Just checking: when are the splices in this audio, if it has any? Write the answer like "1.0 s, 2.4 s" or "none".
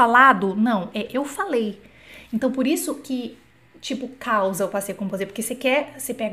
none